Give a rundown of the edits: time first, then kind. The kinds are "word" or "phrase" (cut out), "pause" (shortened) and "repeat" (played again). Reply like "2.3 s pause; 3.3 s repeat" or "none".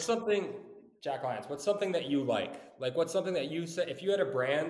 none